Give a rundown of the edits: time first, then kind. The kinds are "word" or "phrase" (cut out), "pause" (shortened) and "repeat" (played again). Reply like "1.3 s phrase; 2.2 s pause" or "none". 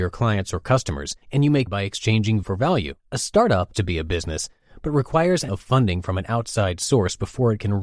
1.2 s pause; 1.7 s word; 2.4 s word; 3.0 s pause; 3.7 s word; 5.5 s word